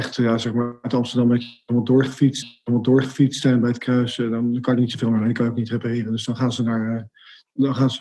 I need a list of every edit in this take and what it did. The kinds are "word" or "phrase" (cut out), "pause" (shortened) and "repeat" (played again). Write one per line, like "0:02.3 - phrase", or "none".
0:02.4 - repeat